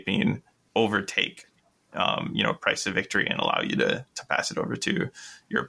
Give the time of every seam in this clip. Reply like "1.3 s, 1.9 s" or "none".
none